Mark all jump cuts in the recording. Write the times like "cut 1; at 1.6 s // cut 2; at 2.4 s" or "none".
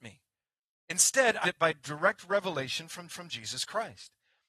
cut 1; at 1.4 s // cut 2; at 3.1 s